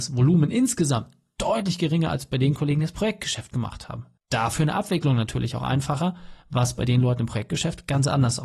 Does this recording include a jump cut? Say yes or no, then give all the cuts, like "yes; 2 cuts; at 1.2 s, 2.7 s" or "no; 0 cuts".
yes; 1 cut; at 4.2 s